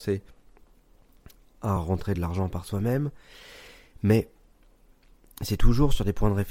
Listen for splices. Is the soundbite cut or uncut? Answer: uncut